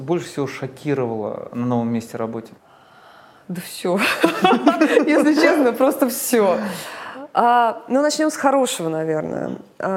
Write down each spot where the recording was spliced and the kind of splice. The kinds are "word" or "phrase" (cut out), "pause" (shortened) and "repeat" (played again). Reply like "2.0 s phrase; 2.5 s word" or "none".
2.6 s pause

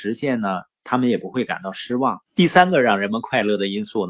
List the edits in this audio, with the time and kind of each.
2.3 s pause

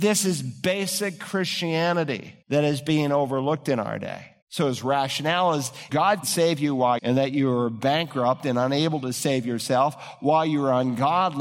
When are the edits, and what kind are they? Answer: 2.4 s pause; 4.4 s pause; 5.9 s word; 6.2 s word; 7.0 s phrase

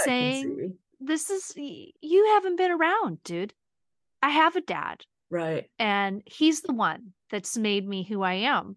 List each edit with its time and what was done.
0.9 s word; 1.9 s word

